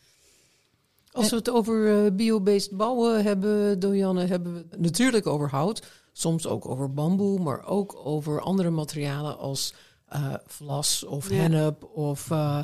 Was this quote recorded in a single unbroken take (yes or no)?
no